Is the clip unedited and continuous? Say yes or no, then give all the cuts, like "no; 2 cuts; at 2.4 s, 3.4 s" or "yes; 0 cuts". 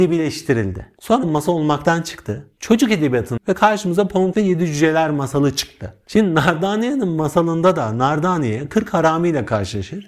no; 3 cuts; at 1.2 s, 3.4 s, 4.3 s